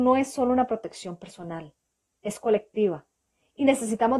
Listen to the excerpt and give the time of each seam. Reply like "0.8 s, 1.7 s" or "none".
none

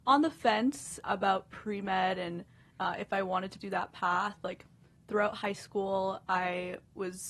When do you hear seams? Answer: 1.0 s, 3.6 s

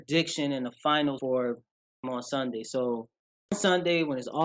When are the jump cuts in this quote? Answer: 1.2 s, 2.0 s, 3.5 s

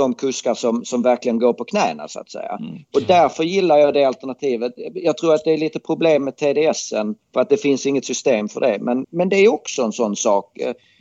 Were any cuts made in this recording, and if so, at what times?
7.2 s, 9.0 s

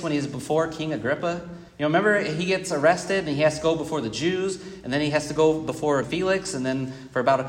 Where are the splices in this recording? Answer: 1.7 s, 6.0 s

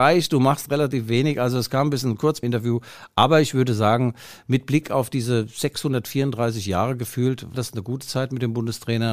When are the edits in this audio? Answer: 2.4 s, 7.5 s

